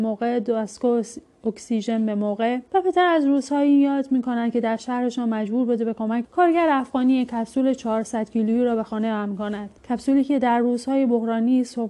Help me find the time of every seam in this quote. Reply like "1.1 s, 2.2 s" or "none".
2.7 s, 6.2 s, 9.8 s